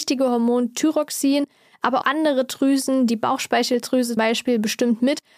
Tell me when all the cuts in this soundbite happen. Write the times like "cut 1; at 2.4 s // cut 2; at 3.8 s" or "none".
cut 1; at 2.0 s // cut 2; at 4.2 s